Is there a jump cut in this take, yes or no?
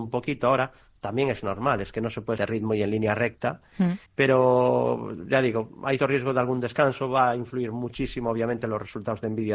yes